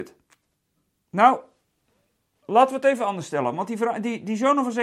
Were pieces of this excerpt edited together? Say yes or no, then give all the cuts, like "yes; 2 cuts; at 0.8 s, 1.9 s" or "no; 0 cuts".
no; 0 cuts